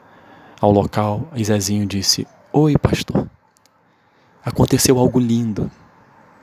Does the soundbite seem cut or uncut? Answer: uncut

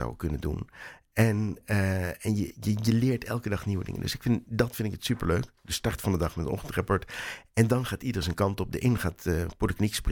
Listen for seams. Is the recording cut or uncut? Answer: uncut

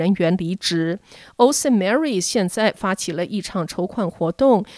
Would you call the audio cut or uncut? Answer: uncut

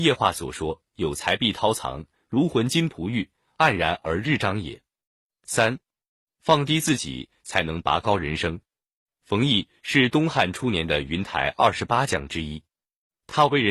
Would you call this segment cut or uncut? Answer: uncut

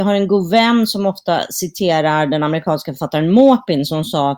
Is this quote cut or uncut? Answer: uncut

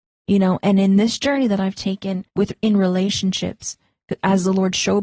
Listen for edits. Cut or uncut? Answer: cut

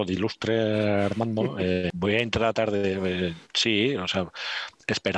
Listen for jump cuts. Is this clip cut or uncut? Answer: cut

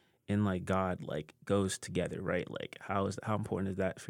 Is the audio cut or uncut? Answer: uncut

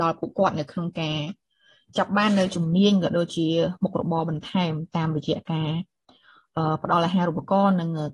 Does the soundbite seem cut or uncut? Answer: uncut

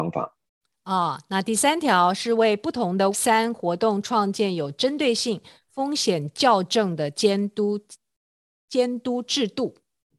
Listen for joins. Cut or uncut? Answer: cut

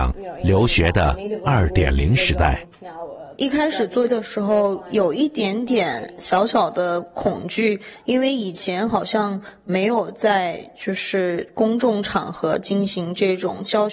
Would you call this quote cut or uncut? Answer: cut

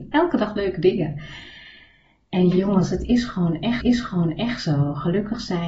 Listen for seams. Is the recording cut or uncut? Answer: cut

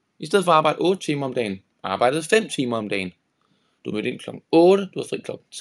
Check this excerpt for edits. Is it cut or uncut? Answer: uncut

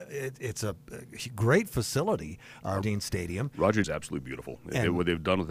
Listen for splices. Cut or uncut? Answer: cut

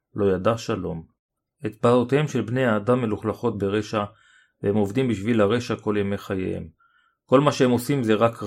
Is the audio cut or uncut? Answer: uncut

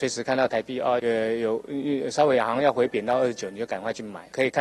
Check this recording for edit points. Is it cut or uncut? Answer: cut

